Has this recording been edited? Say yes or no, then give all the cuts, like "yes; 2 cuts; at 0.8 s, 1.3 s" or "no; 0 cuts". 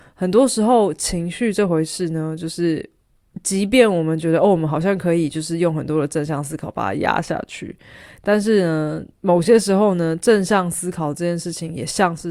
yes; 1 cut; at 9.1 s